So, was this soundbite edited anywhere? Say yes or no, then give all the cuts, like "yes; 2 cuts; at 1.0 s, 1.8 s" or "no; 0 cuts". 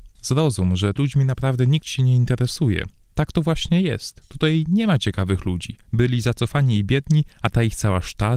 yes; 3 cuts; at 1.0 s, 5.8 s, 7.3 s